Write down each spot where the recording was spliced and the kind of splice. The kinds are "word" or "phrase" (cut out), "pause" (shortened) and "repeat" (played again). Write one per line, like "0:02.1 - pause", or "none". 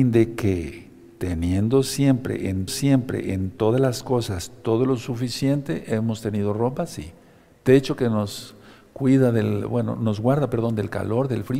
0:02.7 - repeat

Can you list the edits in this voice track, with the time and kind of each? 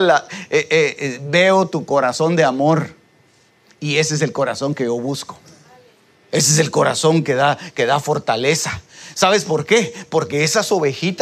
none

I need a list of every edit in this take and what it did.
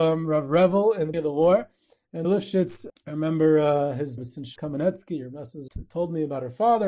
0:01.1 - word
0:02.2 - word
0:02.9 - word
0:04.2 - word
0:04.6 - word
0:05.7 - word

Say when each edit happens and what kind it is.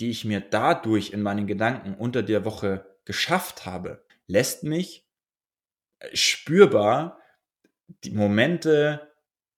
0:04.1 - pause

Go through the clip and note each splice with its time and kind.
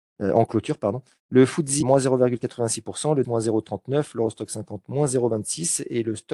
0:01.8 - word
0:03.2 - word

